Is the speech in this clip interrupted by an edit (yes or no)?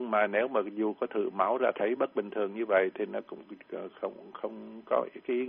no